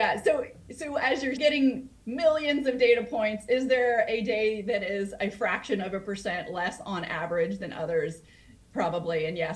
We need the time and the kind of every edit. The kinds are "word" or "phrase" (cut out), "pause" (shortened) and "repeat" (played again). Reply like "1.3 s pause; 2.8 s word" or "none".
1.4 s phrase